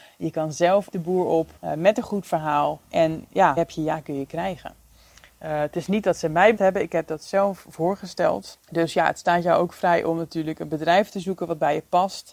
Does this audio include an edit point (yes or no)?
yes